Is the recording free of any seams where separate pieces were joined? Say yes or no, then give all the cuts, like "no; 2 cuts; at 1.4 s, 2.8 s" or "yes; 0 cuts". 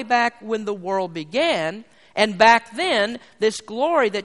yes; 0 cuts